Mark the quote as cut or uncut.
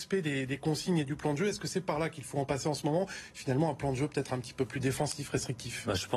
uncut